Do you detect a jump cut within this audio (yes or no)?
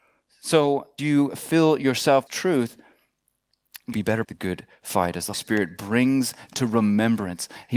yes